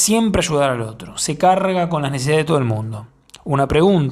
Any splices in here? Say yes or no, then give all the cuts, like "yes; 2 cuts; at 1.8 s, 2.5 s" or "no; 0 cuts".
no; 0 cuts